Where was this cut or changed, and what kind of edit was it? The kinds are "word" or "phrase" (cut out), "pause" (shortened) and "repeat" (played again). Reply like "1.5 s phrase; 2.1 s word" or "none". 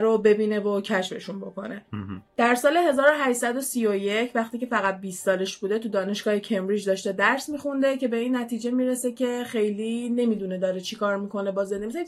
2.3 s pause